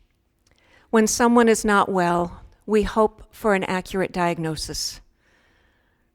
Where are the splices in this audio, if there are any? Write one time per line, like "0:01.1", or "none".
none